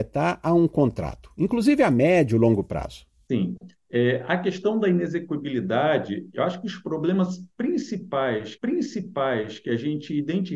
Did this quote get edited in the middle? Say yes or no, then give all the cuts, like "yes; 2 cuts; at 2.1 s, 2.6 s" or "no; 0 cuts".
yes; 1 cut; at 8.6 s